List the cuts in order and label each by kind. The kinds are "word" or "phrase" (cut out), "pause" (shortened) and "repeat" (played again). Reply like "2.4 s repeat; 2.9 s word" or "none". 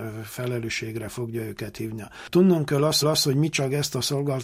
3.0 s repeat